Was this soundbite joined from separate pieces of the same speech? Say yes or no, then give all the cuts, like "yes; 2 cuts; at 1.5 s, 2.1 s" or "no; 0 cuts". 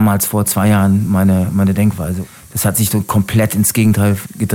no; 0 cuts